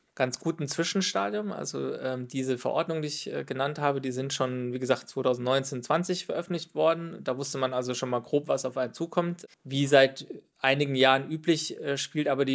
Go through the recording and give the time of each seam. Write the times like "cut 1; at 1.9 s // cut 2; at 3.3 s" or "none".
cut 1; at 9.5 s